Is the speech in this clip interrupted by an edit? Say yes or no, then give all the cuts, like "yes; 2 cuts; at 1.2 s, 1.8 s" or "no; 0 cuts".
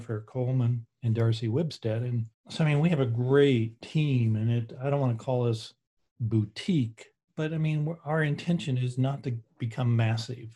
no; 0 cuts